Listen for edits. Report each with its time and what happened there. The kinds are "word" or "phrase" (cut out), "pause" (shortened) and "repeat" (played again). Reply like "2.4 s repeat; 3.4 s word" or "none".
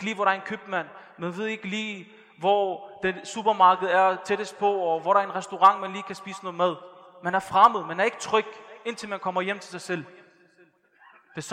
none